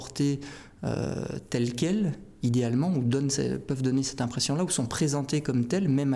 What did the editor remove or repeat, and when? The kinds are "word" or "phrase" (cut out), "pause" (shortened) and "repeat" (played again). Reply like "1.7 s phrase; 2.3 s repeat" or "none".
none